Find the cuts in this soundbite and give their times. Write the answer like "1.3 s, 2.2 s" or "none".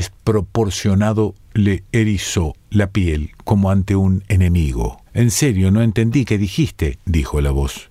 1.4 s, 2.6 s, 5.1 s

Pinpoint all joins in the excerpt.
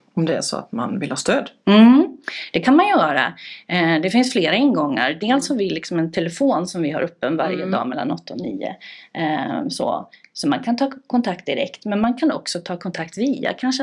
none

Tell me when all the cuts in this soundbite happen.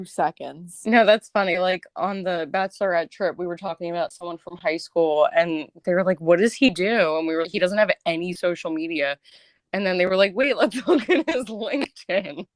7.4 s

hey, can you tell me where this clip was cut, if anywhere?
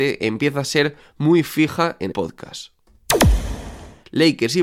2.1 s

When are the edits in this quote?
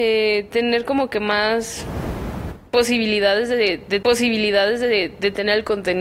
4.0 s

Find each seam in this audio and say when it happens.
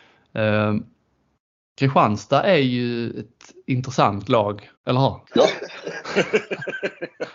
4.8 s, 5.2 s

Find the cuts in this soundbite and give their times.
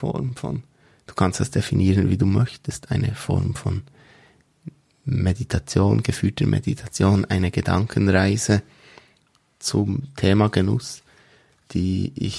none

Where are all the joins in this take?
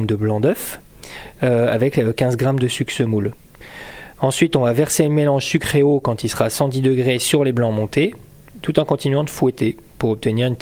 none

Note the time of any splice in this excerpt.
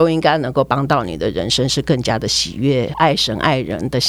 2.9 s

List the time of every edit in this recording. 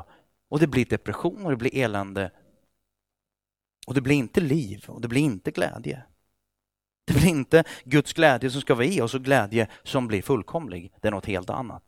none

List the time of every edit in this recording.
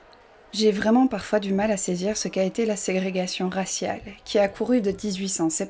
none

